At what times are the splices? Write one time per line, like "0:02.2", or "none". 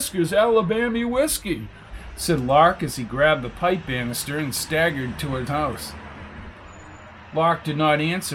0:05.1
0:05.5